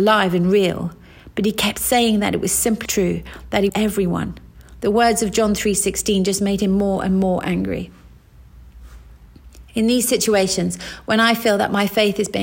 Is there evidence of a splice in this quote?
yes; 2 cuts; at 2.9 s, 3.7 s

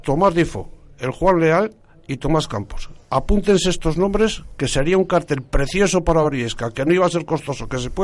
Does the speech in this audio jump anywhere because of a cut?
no; 0 cuts

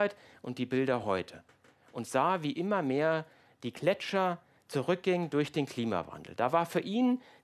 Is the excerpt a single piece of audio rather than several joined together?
yes; 0 cuts

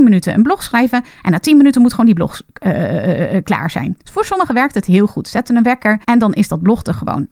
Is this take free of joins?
no; 2 cuts; at 4.0 s, 6.0 s

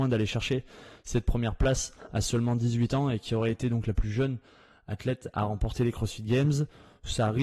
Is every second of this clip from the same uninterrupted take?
yes; 0 cuts

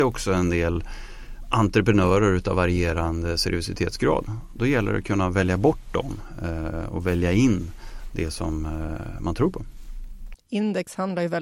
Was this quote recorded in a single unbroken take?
yes; 0 cuts

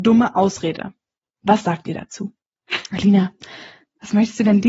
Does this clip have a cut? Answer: no; 0 cuts

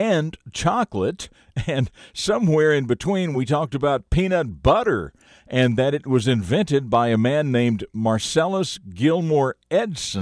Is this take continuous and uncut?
yes; 0 cuts

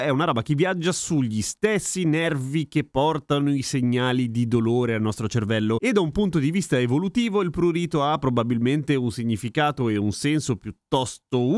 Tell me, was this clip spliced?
no; 0 cuts

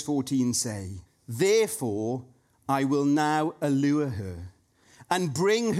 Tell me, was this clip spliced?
yes; 1 cut; at 1.1 s

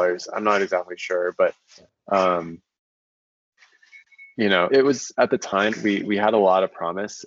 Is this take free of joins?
no; 2 cuts; at 4.7 s, 5.7 s

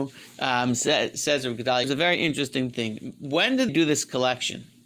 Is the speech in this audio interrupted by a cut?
yes; 2 cuts; at 1.8 s, 3.7 s

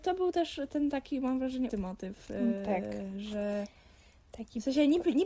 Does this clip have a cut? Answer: yes; 1 cut; at 1.7 s

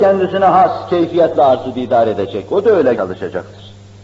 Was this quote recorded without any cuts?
no; 1 cut; at 2.9 s

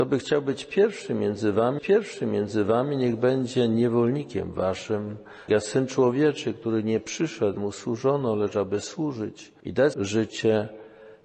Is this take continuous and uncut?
no; 4 cuts; at 1.8 s, 5.5 s, 7.6 s, 9.9 s

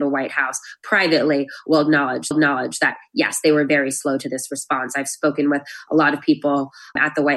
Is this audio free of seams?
no; 1 cut; at 2.3 s

